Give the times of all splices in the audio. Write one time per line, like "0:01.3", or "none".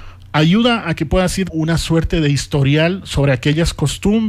0:01.5